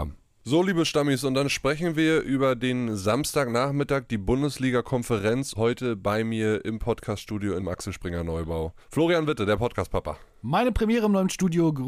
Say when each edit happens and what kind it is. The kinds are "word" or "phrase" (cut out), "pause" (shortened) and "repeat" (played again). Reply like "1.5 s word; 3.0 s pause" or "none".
5.5 s phrase; 7.6 s phrase; 8.8 s pause